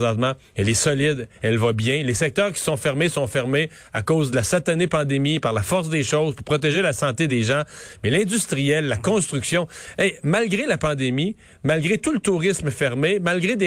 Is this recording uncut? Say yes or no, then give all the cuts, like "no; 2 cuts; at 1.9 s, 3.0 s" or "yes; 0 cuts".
yes; 0 cuts